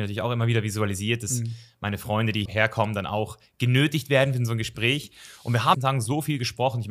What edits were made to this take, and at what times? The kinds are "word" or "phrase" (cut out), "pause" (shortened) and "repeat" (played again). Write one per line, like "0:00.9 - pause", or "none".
0:02.5 - word
0:05.7 - phrase